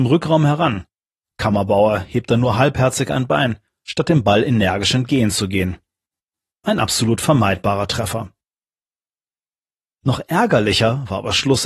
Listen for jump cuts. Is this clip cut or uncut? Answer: uncut